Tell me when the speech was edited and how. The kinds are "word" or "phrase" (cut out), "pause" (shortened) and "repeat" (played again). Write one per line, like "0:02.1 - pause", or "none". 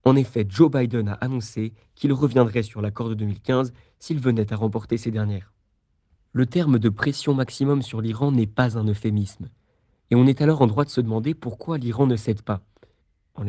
none